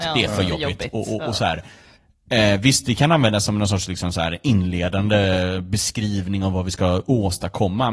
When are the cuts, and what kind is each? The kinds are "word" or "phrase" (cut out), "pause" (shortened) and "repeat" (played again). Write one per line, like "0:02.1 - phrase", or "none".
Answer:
none